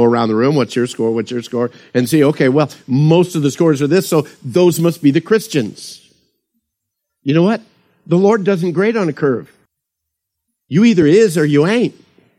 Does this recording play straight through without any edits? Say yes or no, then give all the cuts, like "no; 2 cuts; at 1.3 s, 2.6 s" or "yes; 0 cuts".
yes; 0 cuts